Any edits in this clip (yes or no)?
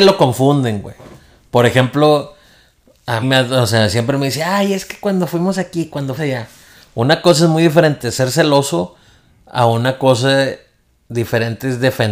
yes